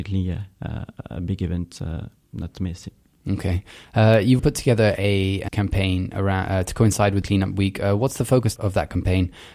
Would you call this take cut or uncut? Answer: cut